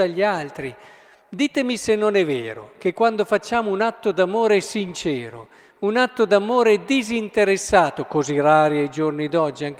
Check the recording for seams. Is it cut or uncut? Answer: uncut